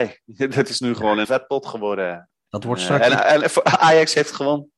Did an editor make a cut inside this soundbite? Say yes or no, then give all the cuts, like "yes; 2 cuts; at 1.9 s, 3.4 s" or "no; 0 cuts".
yes; 1 cut; at 1.2 s